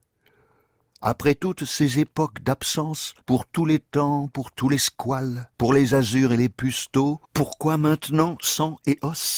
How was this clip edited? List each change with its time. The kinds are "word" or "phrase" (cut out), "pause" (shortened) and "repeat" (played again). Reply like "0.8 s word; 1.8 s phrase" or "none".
3.2 s pause; 5.5 s pause; 7.2 s pause